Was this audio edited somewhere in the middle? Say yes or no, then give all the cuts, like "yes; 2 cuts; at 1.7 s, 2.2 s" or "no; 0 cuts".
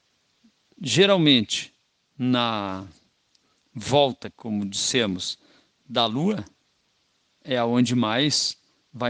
no; 0 cuts